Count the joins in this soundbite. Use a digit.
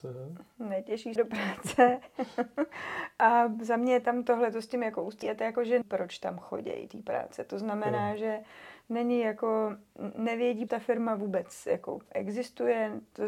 5